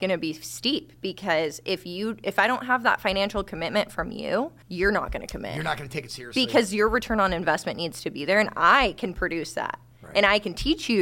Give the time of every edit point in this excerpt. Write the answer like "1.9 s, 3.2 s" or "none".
4.6 s

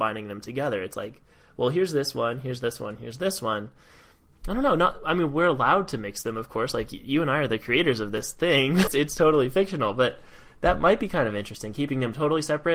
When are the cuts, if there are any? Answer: 8.9 s

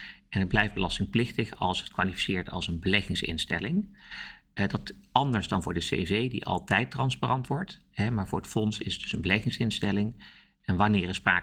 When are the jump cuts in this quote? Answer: none

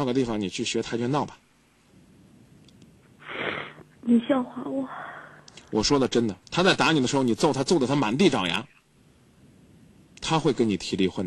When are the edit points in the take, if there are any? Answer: 3.9 s, 6.4 s

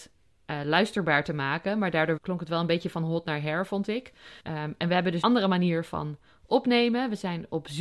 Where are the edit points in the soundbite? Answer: 2.2 s, 4.4 s, 5.2 s

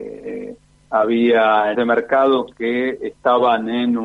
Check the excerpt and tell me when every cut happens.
1.7 s

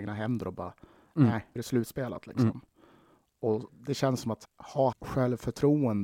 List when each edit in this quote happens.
1.6 s, 3.7 s, 4.4 s, 4.9 s

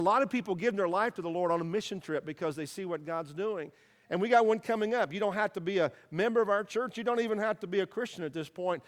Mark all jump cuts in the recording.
none

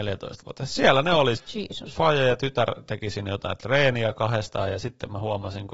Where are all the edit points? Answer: 1.4 s

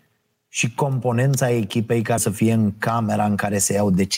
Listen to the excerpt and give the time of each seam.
2.2 s

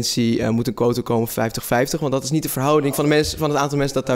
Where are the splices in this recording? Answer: none

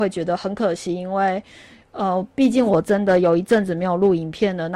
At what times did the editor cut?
none

